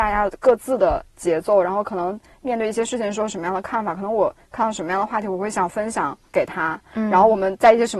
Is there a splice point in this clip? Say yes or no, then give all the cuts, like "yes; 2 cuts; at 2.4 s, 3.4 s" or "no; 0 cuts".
yes; 1 cut; at 6.3 s